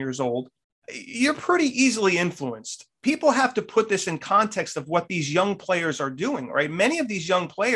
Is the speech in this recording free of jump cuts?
yes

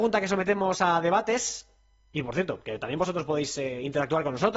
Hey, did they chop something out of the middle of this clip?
no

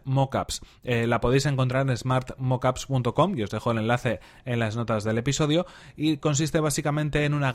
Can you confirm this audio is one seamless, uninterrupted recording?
yes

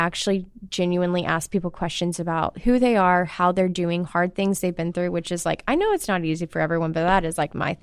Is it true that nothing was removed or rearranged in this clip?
yes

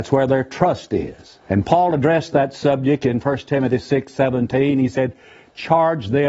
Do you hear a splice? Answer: yes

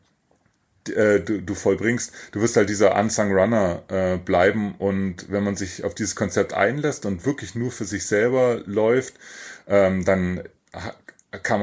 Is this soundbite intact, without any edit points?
yes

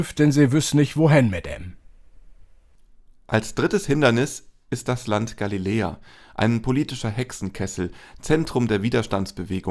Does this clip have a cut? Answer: no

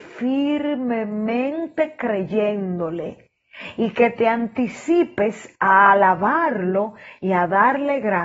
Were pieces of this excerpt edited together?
no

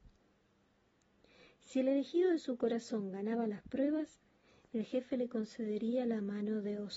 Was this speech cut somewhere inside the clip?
no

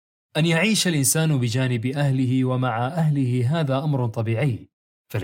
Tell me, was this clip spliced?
no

